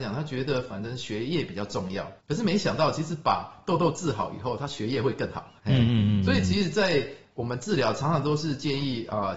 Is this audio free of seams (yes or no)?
no